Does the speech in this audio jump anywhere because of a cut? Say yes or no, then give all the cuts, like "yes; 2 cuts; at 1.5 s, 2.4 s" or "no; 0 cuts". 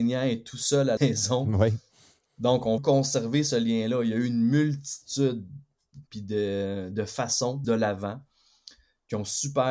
yes; 4 cuts; at 1.0 s, 2.8 s, 6.1 s, 7.6 s